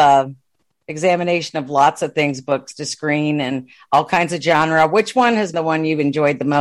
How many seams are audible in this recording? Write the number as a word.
one